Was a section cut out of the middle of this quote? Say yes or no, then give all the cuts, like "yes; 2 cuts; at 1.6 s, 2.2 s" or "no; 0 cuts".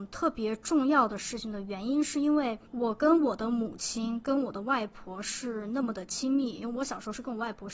yes; 1 cut; at 2.7 s